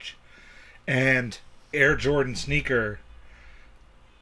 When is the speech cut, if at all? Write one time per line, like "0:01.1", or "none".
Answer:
0:01.7